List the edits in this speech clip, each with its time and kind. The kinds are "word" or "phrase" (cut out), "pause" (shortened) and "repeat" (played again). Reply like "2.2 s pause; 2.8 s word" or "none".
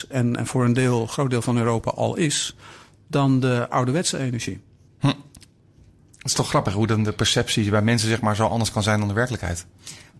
none